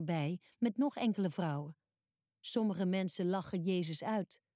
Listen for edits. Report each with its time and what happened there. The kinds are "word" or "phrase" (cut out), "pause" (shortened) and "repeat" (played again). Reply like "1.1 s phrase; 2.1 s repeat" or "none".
none